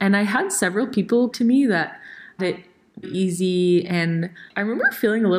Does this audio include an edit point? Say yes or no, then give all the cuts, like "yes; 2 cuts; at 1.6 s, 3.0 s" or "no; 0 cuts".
yes; 4 cuts; at 1.3 s, 2.4 s, 3.0 s, 4.5 s